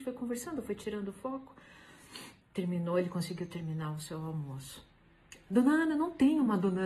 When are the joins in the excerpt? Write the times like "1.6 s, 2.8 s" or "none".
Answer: 2.4 s